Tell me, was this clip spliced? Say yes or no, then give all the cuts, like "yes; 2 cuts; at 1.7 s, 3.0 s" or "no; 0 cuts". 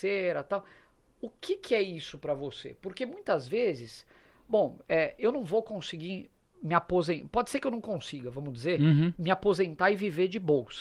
no; 0 cuts